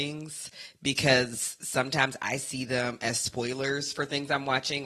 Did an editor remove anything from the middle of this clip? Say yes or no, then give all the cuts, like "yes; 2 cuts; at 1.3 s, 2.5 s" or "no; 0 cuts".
no; 0 cuts